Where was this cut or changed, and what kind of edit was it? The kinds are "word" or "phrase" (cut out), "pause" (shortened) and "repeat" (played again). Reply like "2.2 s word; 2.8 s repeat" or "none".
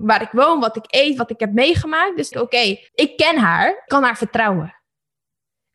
2.3 s word; 2.9 s pause; 3.9 s word